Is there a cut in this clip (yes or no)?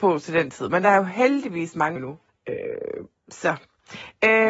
yes